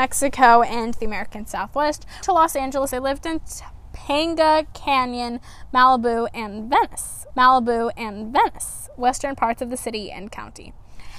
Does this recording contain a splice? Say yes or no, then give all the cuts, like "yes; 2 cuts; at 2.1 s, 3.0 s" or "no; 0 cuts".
yes; 3 cuts; at 2.2 s, 2.9 s, 7.3 s